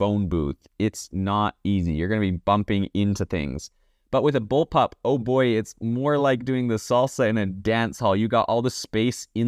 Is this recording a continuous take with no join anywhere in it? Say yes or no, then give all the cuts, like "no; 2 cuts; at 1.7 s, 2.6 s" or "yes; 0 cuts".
yes; 0 cuts